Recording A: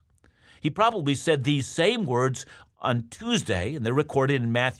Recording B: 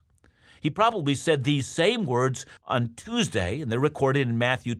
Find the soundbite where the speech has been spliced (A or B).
B